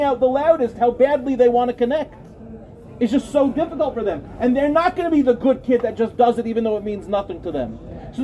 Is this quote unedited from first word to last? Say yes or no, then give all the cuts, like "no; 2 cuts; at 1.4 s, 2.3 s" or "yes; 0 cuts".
yes; 0 cuts